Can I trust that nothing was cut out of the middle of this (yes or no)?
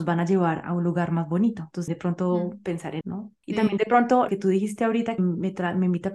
no